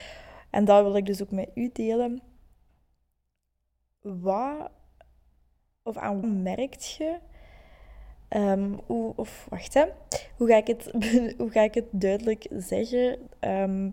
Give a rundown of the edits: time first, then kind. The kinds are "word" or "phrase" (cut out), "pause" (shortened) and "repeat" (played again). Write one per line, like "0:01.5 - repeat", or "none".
0:06.2 - word
0:08.8 - word